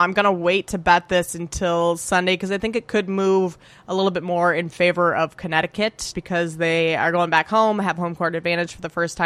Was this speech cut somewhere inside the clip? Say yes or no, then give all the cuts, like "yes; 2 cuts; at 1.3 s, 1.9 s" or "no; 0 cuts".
yes; 1 cut; at 6.1 s